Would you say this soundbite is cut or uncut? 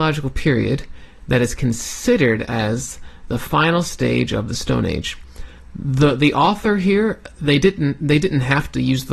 uncut